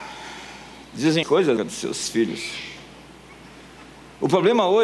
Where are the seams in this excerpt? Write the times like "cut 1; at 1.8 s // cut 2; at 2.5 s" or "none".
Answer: cut 1; at 1.2 s // cut 2; at 1.6 s